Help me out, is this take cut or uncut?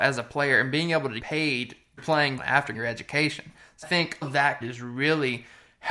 cut